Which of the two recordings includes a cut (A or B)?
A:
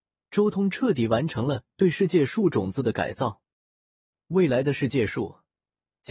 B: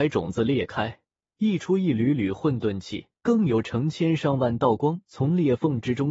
B